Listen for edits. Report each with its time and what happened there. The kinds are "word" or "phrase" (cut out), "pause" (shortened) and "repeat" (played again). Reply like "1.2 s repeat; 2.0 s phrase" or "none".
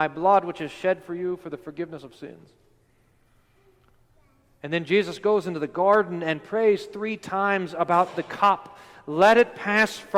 none